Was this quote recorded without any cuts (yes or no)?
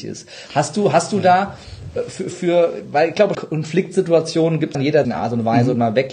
no